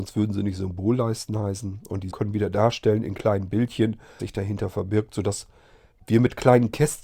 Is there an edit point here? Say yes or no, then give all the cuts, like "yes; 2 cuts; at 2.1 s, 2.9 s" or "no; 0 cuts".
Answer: yes; 3 cuts; at 2.1 s, 4.2 s, 5.9 s